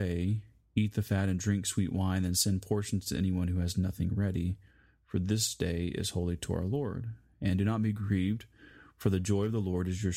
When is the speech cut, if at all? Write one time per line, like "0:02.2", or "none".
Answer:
none